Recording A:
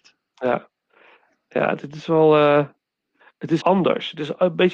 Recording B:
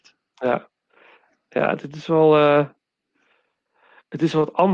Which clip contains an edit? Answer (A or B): A